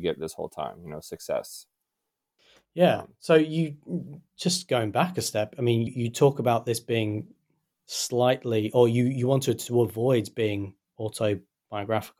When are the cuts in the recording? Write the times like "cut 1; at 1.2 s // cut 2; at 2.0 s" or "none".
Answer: cut 1; at 5.9 s